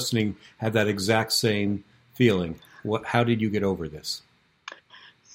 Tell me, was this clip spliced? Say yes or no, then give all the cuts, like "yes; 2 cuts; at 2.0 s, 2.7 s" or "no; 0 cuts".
no; 0 cuts